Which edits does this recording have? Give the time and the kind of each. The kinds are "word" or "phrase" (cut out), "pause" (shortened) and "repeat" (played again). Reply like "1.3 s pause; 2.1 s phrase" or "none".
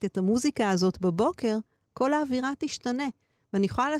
none